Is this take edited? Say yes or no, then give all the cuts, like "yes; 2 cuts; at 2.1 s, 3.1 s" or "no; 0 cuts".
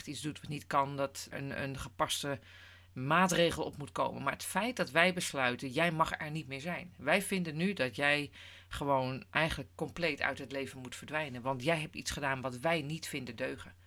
yes; 1 cut; at 1.3 s